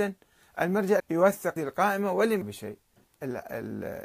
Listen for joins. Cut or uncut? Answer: cut